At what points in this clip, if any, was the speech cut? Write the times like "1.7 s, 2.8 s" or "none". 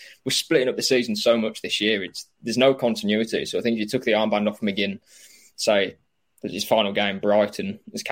none